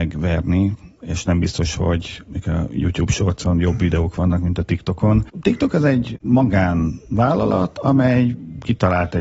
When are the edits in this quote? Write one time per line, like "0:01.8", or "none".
none